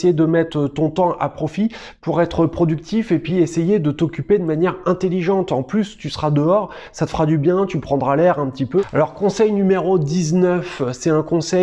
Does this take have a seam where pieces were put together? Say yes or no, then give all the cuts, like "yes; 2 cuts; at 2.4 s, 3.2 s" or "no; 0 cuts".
no; 0 cuts